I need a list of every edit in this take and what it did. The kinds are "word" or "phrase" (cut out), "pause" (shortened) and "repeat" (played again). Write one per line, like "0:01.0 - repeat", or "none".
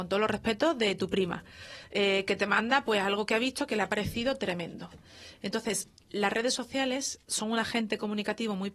0:07.2 - pause

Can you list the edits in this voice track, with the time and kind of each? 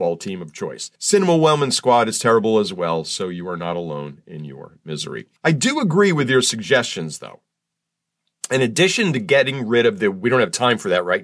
0:01.0 - pause
0:05.4 - pause

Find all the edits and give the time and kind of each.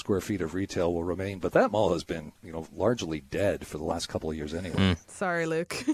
0:02.4 - pause

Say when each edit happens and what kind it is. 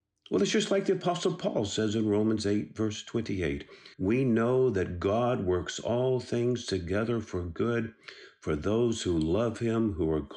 0:03.9 - pause

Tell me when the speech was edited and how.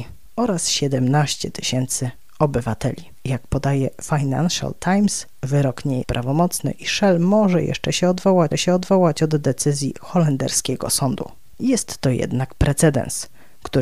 0:06.0 - word
0:08.5 - repeat

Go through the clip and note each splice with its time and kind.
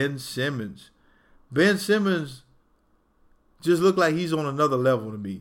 none

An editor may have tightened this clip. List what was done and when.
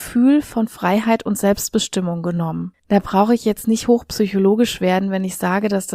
0:02.8 - pause

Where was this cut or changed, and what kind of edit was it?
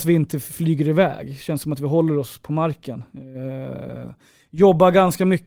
none

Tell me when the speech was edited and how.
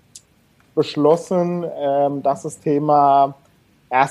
0:02.6 - word

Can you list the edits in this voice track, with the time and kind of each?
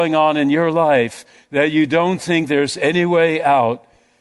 none

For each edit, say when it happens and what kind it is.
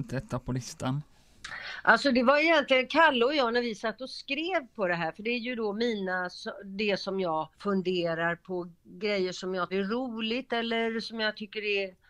0:07.5 - pause
0:09.7 - word

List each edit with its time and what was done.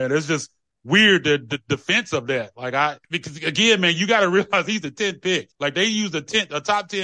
0:03.0 - pause
0:05.5 - pause

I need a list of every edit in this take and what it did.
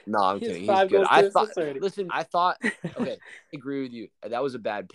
0:02.1 - word
0:03.5 - word

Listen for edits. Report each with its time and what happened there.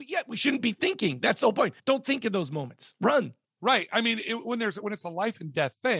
0:01.8 - pause
0:03.5 - pause

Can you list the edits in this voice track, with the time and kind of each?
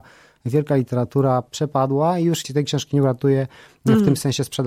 0:02.4 - word

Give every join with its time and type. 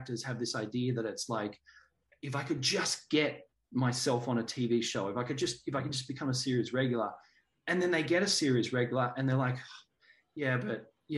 none

